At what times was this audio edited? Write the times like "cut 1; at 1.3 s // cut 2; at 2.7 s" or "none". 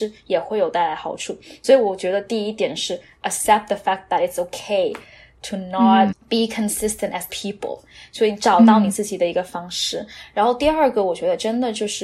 cut 1; at 6.1 s // cut 2; at 7.3 s